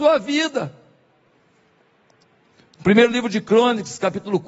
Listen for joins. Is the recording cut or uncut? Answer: uncut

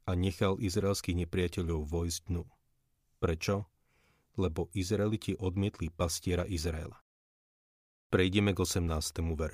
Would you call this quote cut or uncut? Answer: uncut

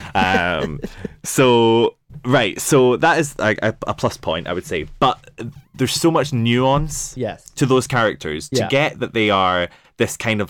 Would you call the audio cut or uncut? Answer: uncut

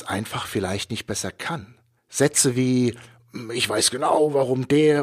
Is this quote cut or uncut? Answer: cut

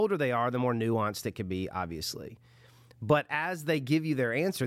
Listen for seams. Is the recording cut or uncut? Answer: uncut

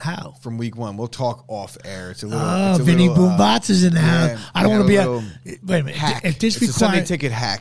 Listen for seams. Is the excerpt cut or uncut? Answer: uncut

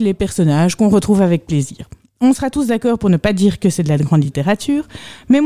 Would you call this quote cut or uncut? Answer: uncut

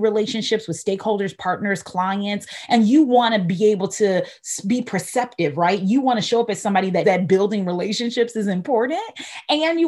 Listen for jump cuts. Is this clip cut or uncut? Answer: cut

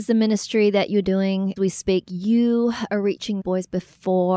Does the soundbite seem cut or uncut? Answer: cut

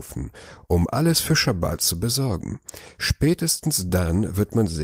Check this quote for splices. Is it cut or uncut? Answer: uncut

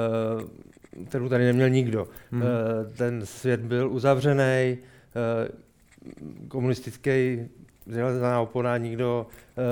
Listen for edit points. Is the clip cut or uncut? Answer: uncut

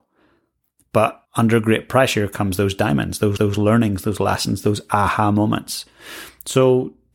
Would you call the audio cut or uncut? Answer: cut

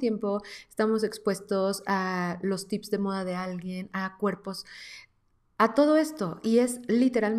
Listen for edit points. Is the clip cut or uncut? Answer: uncut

